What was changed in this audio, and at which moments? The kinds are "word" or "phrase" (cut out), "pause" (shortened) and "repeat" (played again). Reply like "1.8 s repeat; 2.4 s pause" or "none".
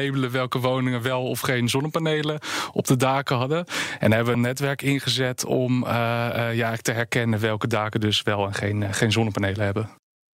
4.3 s word